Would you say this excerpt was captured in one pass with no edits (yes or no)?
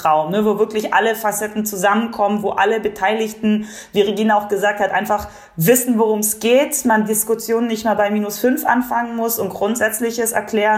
yes